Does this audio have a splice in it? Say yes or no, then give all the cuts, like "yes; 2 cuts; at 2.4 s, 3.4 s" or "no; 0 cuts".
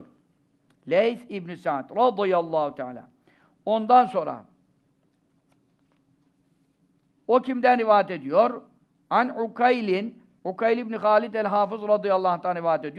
no; 0 cuts